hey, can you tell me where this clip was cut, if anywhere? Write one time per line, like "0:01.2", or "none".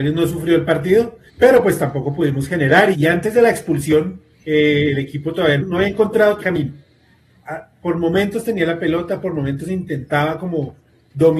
0:01.3
0:02.9
0:04.3
0:05.6
0:06.4